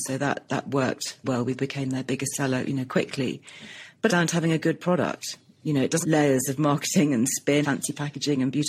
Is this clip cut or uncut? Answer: cut